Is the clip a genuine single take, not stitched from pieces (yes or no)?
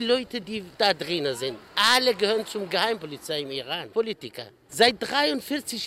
no